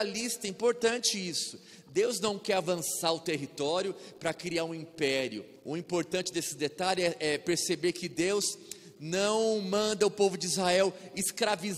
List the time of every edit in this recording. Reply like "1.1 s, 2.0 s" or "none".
5.6 s